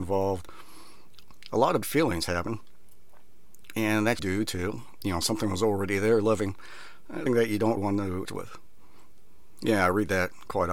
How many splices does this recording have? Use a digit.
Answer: 5